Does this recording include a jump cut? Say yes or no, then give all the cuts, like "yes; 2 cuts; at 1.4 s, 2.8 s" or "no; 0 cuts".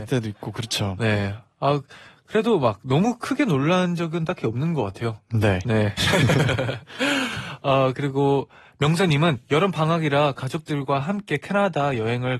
no; 0 cuts